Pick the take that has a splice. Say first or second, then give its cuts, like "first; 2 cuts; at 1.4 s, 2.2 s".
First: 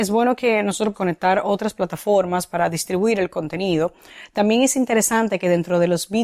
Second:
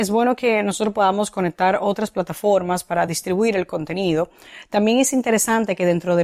first; 1 cut; at 0.9 s